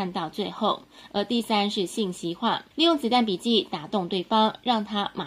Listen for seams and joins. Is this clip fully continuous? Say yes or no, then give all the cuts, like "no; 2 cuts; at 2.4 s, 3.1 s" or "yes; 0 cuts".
no; 1 cut; at 2.7 s